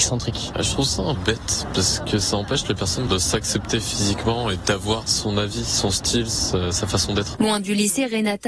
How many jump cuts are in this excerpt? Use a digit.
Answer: 1